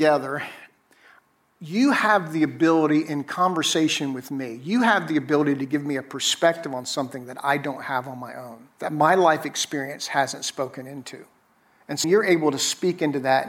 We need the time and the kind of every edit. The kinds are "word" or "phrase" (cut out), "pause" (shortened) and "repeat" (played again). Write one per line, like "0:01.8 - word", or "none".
0:08.7 - pause
0:11.4 - pause
0:12.0 - word